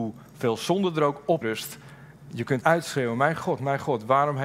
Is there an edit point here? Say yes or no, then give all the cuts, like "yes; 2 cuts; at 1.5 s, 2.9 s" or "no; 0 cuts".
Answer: yes; 2 cuts; at 1.4 s, 2.6 s